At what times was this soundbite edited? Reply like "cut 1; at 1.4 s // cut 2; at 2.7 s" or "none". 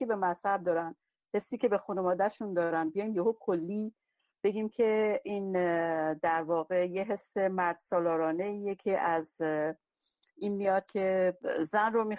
none